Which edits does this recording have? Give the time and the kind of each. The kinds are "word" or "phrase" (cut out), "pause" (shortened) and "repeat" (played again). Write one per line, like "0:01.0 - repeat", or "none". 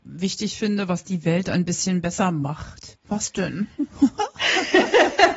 0:03.0 - pause